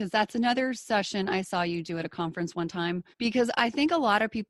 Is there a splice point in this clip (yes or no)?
yes